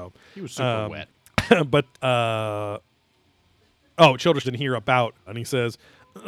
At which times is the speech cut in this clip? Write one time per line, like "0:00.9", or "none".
0:01.1
0:01.9
0:04.4
0:05.3